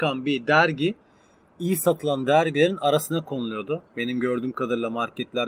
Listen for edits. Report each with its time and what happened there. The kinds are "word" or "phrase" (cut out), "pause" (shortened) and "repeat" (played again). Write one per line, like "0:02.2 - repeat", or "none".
none